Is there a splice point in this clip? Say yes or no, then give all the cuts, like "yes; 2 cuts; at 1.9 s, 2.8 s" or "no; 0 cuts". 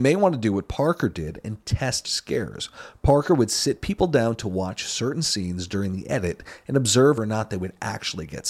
yes; 2 cuts; at 2.0 s, 7.2 s